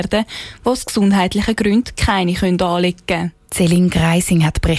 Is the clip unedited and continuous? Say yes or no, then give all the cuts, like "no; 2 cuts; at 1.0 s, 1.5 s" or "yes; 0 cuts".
no; 1 cut; at 3.4 s